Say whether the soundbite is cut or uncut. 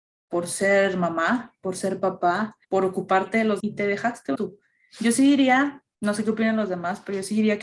cut